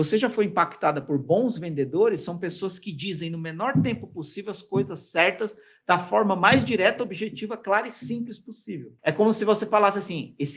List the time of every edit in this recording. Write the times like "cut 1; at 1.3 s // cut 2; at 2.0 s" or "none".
none